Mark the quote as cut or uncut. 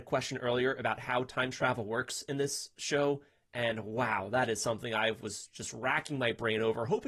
uncut